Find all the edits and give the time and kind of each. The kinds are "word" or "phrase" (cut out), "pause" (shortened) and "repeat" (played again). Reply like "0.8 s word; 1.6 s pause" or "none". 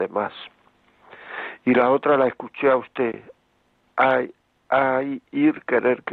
none